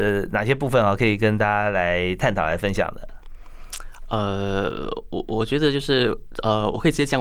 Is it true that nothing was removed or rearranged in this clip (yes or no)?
yes